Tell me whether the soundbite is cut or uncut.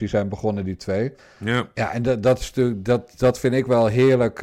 cut